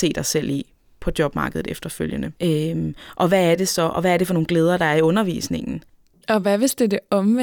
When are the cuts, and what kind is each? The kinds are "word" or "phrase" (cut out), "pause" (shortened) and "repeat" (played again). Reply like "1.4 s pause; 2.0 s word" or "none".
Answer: none